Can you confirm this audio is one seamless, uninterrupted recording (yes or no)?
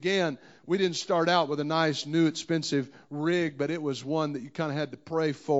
yes